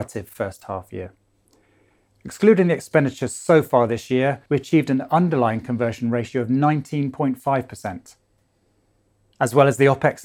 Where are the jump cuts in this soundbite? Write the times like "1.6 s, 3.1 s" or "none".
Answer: 4.5 s